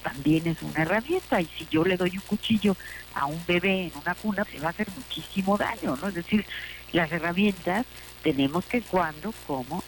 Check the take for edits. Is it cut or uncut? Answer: cut